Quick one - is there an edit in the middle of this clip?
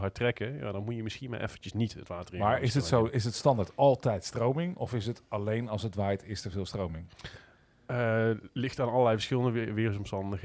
no; 0 cuts

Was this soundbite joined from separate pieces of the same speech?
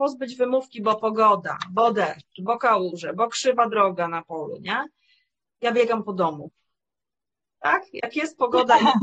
no; 0 cuts

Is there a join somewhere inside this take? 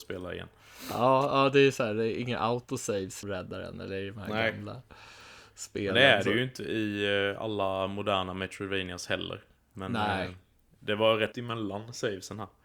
yes; 2 cuts; at 3.2 s, 11.3 s

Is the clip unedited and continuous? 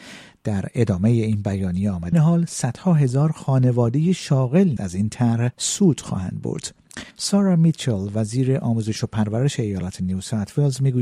no; 4 cuts; at 2.1 s, 4.8 s, 5.5 s, 7.1 s

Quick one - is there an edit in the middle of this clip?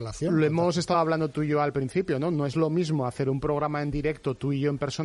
no; 0 cuts

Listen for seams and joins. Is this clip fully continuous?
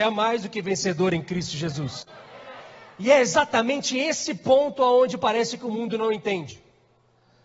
yes; 0 cuts

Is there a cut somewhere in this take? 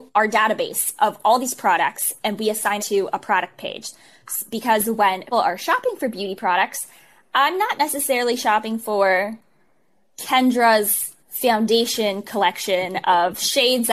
yes; 3 cuts; at 2.8 s, 5.3 s, 11.2 s

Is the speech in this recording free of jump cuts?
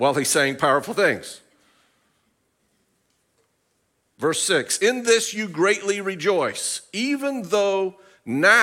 yes; 0 cuts

